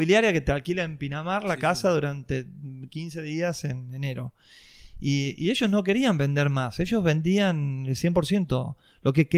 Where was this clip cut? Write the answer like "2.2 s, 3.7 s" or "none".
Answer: none